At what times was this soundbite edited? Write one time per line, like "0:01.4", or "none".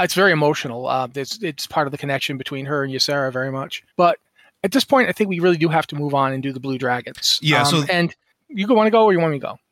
0:03.9